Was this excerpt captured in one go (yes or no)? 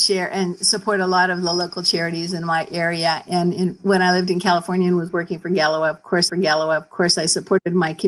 no